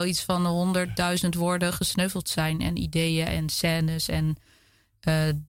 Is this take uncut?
yes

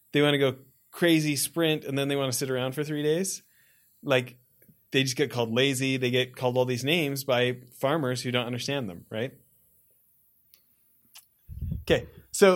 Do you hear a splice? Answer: no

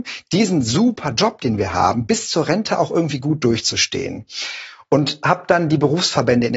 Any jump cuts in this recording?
no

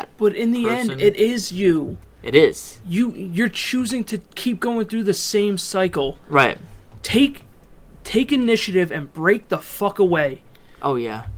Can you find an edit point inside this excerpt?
no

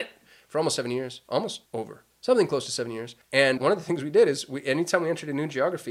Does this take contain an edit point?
yes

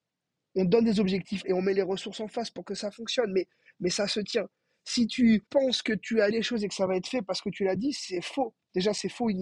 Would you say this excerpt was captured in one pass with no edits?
no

